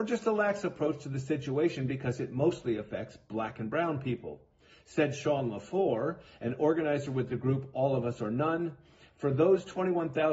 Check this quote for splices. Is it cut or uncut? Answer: uncut